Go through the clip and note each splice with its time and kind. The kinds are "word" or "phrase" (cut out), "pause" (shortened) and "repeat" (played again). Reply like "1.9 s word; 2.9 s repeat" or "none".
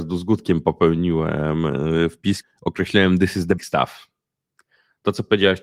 2.4 s word; 3.6 s word